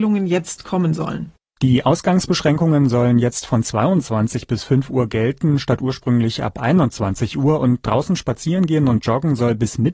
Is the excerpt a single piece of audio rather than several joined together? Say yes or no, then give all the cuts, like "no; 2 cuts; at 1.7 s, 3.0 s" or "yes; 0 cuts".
yes; 0 cuts